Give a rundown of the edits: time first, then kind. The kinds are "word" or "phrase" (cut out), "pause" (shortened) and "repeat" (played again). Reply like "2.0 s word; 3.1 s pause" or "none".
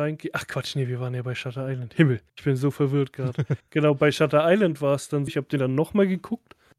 2.3 s pause; 5.3 s word